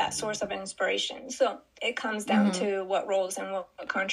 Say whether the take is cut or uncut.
cut